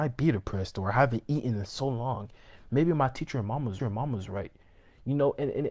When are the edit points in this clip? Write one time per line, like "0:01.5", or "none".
0:03.8